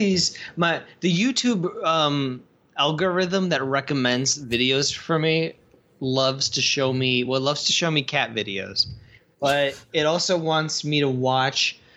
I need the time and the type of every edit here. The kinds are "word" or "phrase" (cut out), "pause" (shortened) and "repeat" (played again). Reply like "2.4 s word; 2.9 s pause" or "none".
none